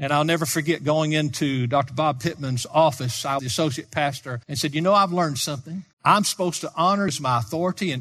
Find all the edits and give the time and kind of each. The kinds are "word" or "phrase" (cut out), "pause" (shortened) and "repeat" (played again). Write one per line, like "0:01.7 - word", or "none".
0:03.4 - word
0:04.4 - pause
0:05.9 - pause
0:07.1 - word